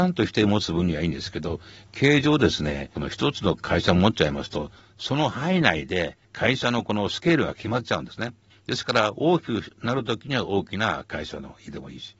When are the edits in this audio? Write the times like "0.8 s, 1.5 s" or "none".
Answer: 6.2 s, 8.5 s